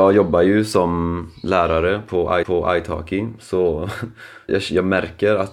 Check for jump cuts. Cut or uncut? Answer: cut